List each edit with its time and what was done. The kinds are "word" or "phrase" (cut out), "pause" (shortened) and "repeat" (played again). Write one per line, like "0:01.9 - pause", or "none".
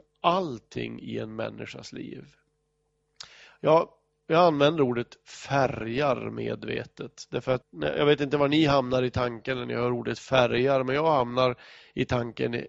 0:07.6 - word